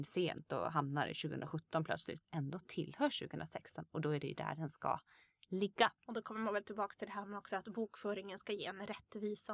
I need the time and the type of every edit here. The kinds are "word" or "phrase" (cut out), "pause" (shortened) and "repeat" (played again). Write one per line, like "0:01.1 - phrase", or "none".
0:02.2 - phrase
0:06.0 - pause